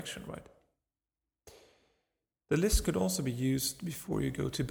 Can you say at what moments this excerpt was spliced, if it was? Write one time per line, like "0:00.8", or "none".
none